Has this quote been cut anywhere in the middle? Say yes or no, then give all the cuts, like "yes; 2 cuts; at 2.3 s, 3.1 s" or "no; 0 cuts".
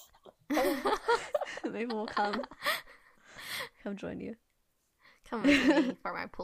no; 0 cuts